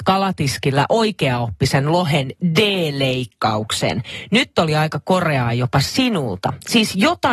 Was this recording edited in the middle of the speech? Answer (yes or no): no